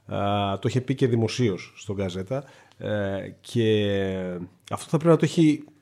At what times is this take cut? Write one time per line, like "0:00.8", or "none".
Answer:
none